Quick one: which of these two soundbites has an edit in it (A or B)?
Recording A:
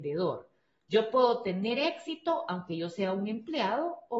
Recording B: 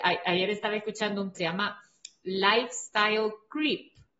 B